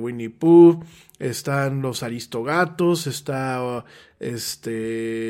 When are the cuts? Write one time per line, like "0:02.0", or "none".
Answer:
none